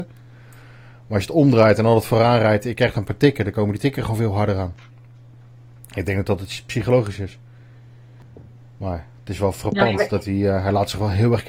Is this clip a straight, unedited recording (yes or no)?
yes